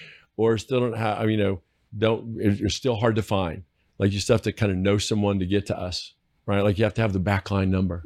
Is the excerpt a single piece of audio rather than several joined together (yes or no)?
yes